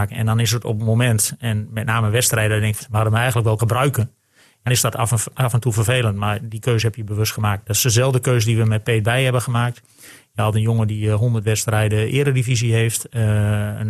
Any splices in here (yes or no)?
yes